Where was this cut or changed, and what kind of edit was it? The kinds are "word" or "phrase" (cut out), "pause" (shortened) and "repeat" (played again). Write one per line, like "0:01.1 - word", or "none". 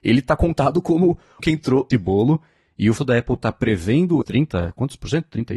0:01.4 - word
0:01.9 - word
0:03.0 - word
0:04.2 - word